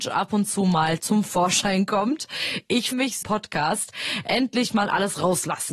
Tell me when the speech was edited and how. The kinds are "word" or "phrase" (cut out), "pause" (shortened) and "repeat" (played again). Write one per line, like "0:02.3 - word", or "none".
0:02.9 - word
0:03.2 - phrase